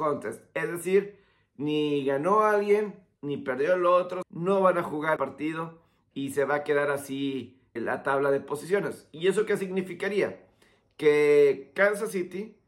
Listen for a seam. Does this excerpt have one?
yes; 3 cuts; at 4.2 s, 5.2 s, 7.8 s

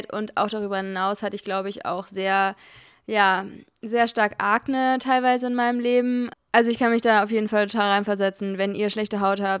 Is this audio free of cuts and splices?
yes; 0 cuts

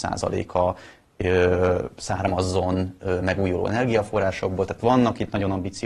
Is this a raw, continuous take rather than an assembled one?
yes; 0 cuts

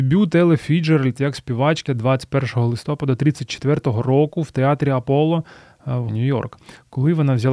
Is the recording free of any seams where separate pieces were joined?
no; 2 cuts; at 1.9 s, 6.1 s

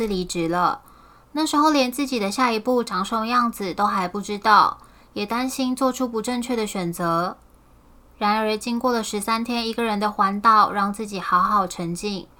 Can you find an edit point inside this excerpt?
no; 0 cuts

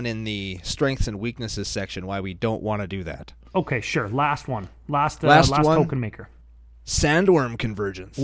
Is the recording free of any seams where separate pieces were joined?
yes; 0 cuts

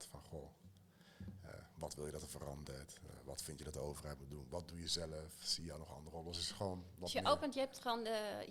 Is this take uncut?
yes; 0 cuts

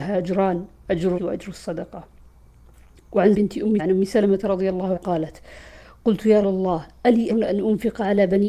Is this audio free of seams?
no; 6 cuts; at 1.2 s, 3.3 s, 3.8 s, 5.0 s, 6.4 s, 7.3 s

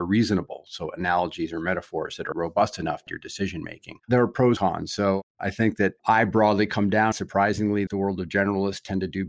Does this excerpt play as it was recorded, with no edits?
no; 7 cuts; at 2.3 s, 3.1 s, 4.0 s, 4.6 s, 6.0 s, 7.1 s, 7.9 s

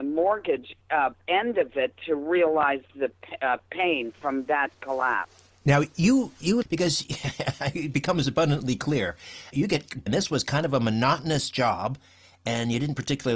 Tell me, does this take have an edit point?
yes; 3 cuts; at 6.6 s, 9.5 s, 10.1 s

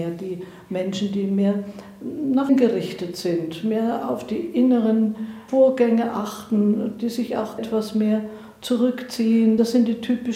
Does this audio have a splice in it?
yes; 2 cuts; at 2.5 s, 7.6 s

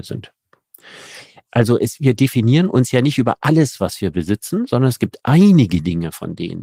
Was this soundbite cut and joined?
no; 0 cuts

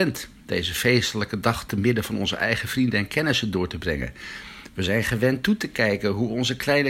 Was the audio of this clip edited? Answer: no; 0 cuts

